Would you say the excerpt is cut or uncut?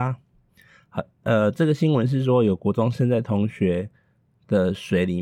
uncut